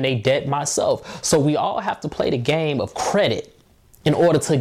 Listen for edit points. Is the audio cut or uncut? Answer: uncut